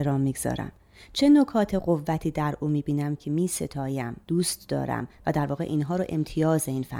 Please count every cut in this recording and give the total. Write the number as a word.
one